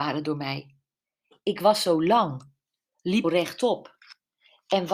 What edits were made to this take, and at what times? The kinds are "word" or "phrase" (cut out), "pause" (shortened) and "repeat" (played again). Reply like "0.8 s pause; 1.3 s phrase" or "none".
3.2 s word